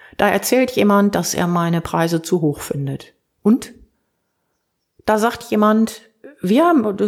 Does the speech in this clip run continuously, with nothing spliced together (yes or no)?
yes